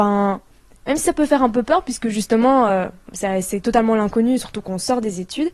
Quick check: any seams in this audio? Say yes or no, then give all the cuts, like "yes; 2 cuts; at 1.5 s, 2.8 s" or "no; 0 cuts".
no; 0 cuts